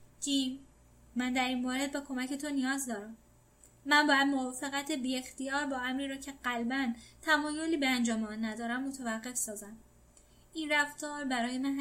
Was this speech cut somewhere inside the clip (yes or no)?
no